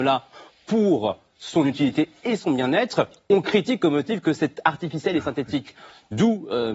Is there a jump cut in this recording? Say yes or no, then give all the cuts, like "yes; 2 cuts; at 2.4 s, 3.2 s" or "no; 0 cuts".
no; 0 cuts